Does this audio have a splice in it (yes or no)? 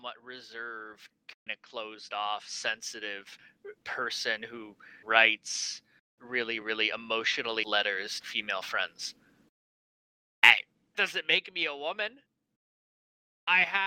yes